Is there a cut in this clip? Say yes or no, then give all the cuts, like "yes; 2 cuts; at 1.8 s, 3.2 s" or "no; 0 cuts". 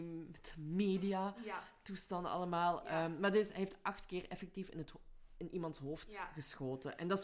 no; 0 cuts